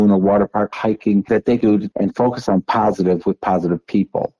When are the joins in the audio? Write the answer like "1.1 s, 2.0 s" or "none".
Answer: 1.3 s, 1.6 s, 1.9 s